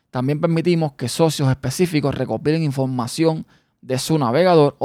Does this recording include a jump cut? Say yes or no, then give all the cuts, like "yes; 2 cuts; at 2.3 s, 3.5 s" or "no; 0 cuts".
no; 0 cuts